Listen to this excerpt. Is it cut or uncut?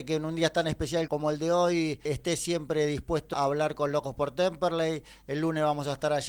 cut